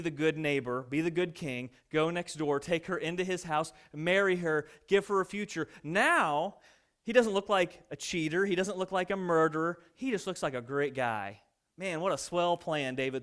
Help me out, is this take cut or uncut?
uncut